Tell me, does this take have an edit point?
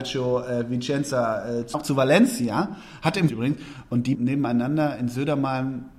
yes; 3 cuts; at 1.7 s, 3.3 s, 4.1 s

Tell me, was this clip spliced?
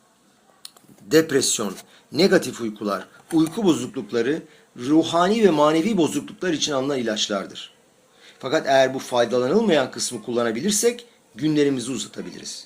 no; 0 cuts

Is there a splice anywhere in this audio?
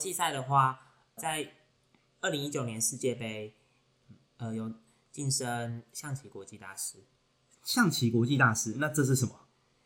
yes; 1 cut; at 1.2 s

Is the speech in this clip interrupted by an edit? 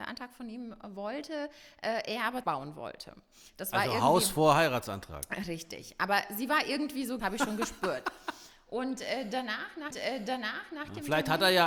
yes; 3 cuts; at 2.4 s, 7.2 s, 9.9 s

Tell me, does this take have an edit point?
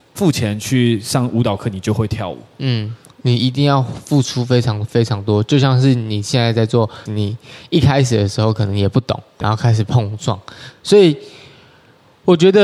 yes; 2 cuts; at 7.1 s, 9.4 s

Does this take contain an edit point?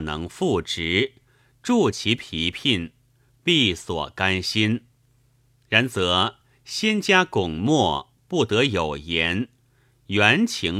no; 0 cuts

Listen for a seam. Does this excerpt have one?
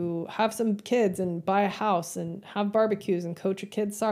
no; 0 cuts

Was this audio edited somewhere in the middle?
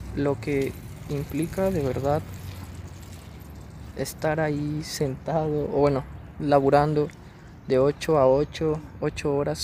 no; 0 cuts

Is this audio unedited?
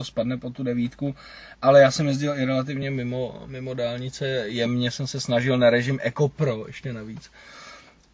yes; 0 cuts

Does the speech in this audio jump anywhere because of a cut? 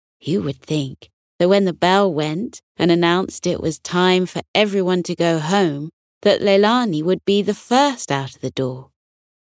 no; 0 cuts

